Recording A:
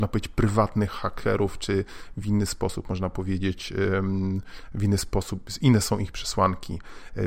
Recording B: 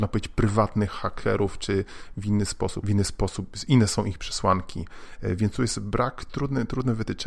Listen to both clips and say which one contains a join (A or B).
B